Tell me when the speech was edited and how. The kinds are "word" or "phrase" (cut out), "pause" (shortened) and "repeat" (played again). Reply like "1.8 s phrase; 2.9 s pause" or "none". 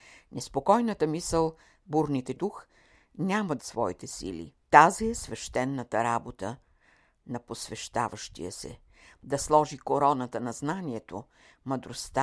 2.4 s phrase; 3.6 s word; 4.6 s pause